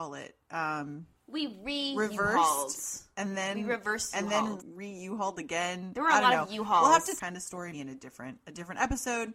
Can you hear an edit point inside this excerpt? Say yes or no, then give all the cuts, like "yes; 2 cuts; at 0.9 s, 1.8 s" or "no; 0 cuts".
yes; 4 cuts; at 1.1 s, 4.6 s, 7.2 s, 7.7 s